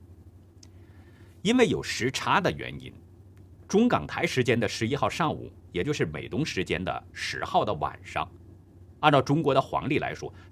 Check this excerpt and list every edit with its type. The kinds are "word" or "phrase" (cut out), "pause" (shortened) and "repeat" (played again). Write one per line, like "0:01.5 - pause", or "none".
0:09.0 - pause